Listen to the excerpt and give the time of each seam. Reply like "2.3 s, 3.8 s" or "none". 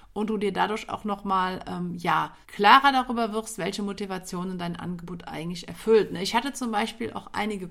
2.4 s